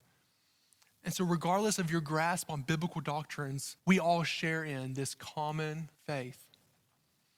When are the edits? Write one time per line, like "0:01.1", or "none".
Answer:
0:03.8
0:05.9